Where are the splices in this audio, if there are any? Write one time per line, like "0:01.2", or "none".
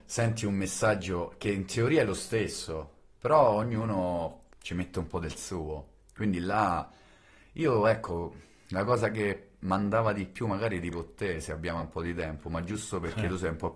0:04.5
0:10.9
0:11.8